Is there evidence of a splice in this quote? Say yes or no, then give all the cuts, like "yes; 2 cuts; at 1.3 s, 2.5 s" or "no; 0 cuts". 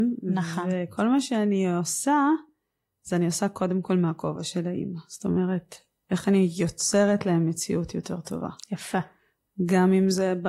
no; 0 cuts